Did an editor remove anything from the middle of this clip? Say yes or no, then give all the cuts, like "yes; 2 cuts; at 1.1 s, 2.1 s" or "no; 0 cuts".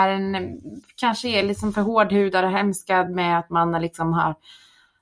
no; 0 cuts